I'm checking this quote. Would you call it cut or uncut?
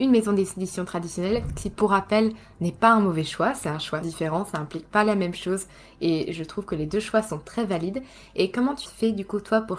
cut